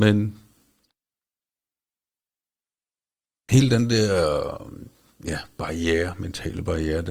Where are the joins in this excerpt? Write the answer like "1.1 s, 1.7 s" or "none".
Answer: none